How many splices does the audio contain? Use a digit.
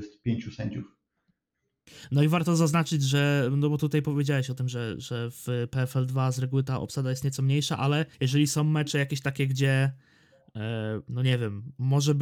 1